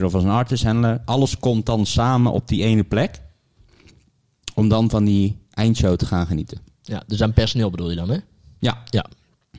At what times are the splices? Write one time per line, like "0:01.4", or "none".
none